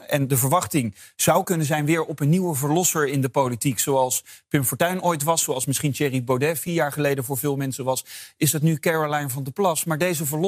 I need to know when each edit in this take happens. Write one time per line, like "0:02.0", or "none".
none